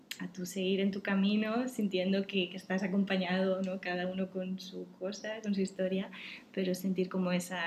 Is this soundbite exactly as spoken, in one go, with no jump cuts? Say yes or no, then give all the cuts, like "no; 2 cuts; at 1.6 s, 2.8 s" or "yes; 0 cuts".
yes; 0 cuts